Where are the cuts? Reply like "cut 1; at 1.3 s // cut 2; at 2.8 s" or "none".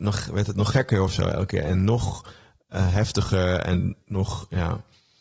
cut 1; at 4.0 s